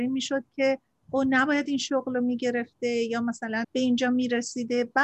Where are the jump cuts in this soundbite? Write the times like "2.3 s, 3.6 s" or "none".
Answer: 3.6 s